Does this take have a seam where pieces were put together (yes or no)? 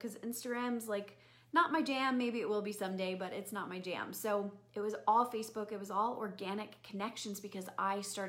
no